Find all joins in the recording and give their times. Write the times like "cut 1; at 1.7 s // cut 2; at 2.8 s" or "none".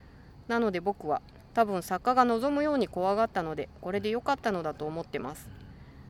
cut 1; at 1.5 s